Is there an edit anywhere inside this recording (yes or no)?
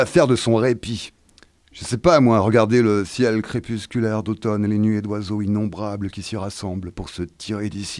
no